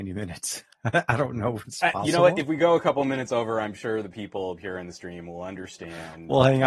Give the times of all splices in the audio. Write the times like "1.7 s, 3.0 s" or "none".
none